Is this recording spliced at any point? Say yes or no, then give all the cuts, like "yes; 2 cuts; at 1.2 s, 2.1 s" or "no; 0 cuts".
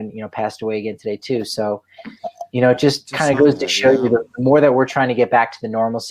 no; 0 cuts